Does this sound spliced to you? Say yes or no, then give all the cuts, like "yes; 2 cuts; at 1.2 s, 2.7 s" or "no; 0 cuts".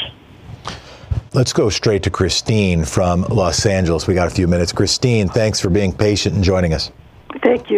no; 0 cuts